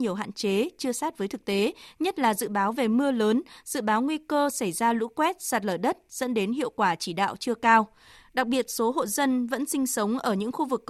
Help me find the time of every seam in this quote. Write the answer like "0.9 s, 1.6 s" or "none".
none